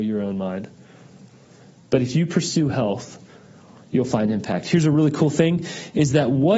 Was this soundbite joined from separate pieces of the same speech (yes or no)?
no